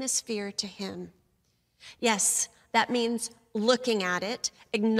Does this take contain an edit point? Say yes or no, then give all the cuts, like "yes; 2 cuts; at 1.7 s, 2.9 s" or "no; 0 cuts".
no; 0 cuts